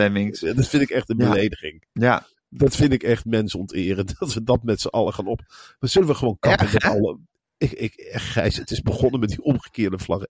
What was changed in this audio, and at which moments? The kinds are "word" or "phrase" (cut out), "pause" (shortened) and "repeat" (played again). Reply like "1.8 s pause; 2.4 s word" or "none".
none